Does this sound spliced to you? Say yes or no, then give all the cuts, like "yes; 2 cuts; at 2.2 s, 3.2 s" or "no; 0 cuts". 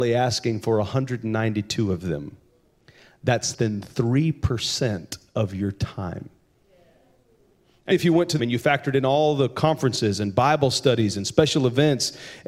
yes; 3 cuts; at 3.5 s, 7.9 s, 8.4 s